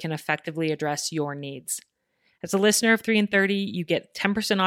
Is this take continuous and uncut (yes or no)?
yes